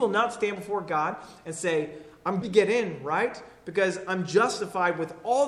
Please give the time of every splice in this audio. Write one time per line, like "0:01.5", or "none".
0:02.4